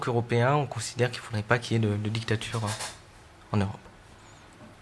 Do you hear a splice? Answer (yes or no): no